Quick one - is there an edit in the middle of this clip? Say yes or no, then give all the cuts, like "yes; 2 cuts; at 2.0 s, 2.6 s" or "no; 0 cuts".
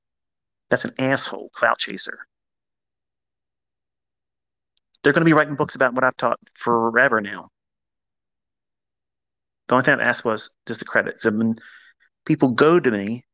no; 0 cuts